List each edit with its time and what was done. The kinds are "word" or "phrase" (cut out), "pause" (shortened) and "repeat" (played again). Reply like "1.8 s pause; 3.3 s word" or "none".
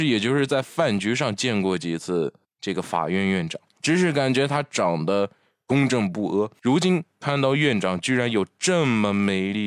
none